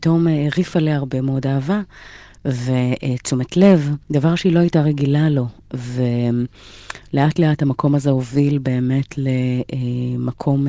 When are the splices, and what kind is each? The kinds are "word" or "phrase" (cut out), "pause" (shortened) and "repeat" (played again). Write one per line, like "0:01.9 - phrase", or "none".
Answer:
0:04.0 - pause